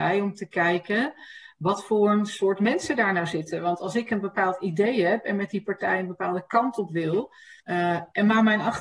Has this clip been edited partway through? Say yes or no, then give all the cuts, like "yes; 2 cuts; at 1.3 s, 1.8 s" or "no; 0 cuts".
yes; 1 cut; at 7.6 s